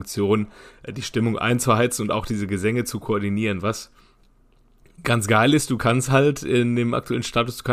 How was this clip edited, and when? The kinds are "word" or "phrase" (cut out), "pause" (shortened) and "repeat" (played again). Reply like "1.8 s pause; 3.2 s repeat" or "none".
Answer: none